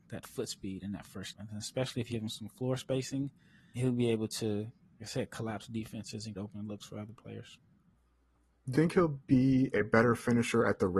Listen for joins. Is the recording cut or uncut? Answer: cut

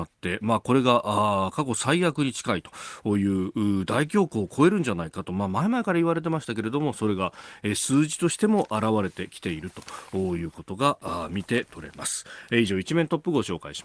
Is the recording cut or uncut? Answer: uncut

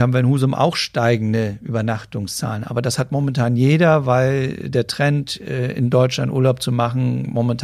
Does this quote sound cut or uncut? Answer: uncut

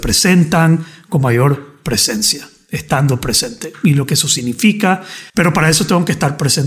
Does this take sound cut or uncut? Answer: cut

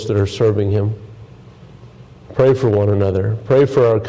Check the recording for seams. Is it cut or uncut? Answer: uncut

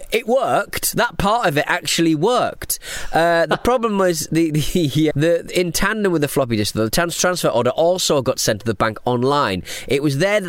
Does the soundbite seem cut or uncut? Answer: cut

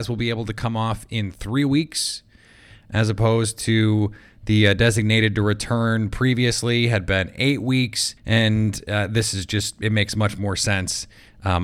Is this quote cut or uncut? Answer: cut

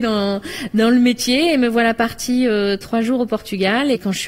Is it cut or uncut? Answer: uncut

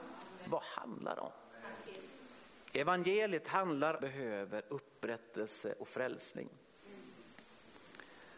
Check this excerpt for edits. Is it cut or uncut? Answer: cut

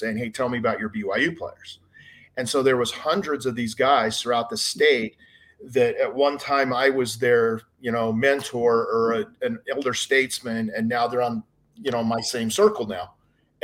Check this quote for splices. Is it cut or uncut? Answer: uncut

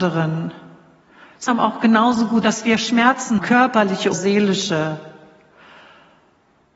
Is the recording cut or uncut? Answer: cut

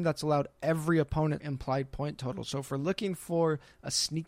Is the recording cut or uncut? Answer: cut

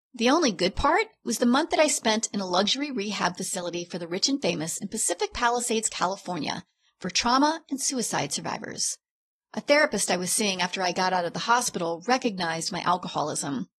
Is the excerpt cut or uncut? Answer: uncut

